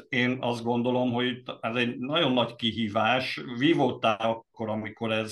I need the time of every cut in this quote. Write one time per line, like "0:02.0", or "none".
0:04.2